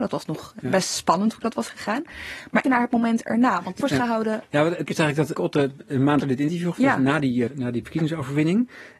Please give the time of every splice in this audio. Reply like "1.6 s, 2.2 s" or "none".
2.6 s, 3.8 s, 4.9 s, 5.4 s, 6.2 s, 6.7 s, 7.5 s